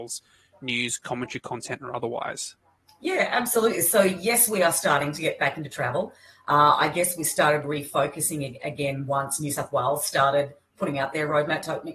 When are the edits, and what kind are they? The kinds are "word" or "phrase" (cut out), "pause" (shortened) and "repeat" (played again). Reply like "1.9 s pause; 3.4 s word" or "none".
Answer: none